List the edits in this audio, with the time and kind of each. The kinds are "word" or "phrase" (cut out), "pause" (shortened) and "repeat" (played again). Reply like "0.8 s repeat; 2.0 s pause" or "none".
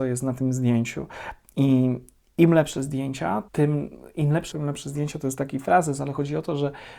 3.5 s pause; 4.5 s word